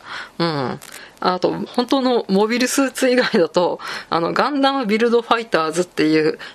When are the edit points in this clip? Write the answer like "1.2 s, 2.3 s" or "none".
1.7 s